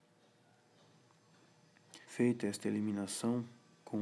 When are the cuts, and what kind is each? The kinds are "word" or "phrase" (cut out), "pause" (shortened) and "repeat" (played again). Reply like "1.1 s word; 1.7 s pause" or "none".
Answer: 2.0 s pause